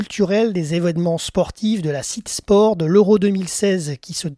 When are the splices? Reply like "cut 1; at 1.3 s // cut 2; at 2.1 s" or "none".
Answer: cut 1; at 2.3 s